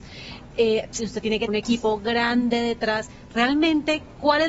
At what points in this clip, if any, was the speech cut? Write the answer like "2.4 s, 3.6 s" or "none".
1.0 s, 1.5 s